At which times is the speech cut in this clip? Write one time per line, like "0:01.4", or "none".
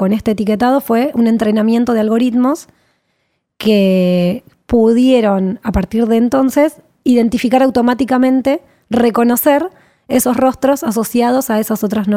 none